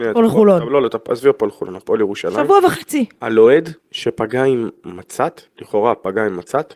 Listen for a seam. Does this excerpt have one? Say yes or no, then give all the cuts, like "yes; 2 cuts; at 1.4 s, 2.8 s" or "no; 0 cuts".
yes; 2 cuts; at 3.8 s, 5.5 s